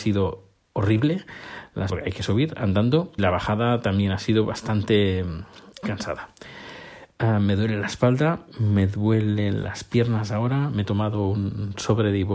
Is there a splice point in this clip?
yes; 3 cuts; at 1.9 s, 3.2 s, 5.8 s

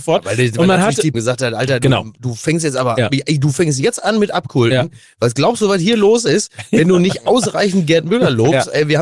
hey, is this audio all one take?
no; 1 cut; at 1.1 s

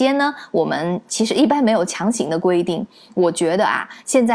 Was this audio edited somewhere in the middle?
no; 0 cuts

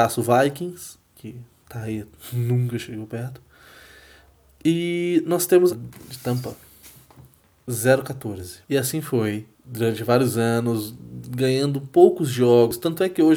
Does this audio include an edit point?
yes; 4 cuts; at 1.0 s, 5.7 s, 8.6 s, 9.5 s

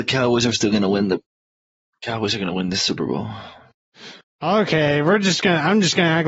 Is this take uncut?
yes; 0 cuts

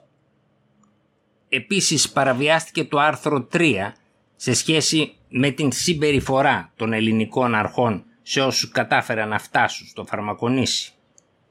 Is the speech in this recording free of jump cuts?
yes; 0 cuts

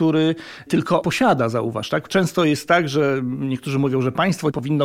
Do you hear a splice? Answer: yes; 1 cut; at 1.0 s

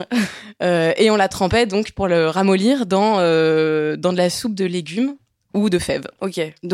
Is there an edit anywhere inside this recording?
no; 0 cuts

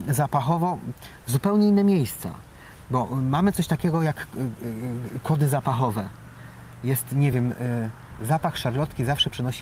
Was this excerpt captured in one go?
yes; 0 cuts

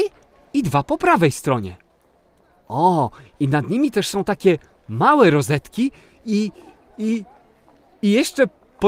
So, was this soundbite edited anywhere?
no; 0 cuts

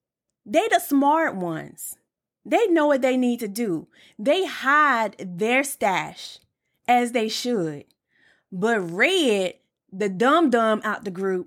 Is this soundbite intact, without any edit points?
yes; 0 cuts

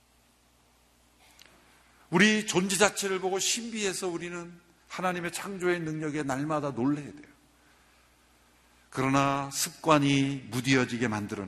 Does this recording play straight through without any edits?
yes; 0 cuts

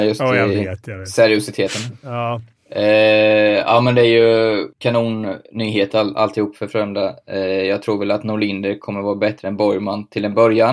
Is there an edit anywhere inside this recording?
yes; 1 cut; at 4.7 s

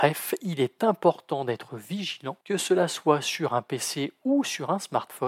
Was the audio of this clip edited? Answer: yes; 1 cut; at 2.4 s

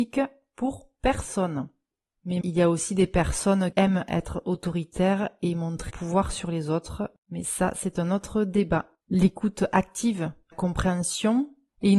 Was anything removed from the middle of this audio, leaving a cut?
yes; 6 cuts; at 2.4 s, 3.7 s, 5.9 s, 7.2 s, 9.0 s, 10.5 s

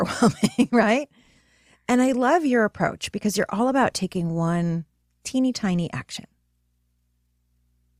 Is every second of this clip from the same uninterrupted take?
yes; 0 cuts

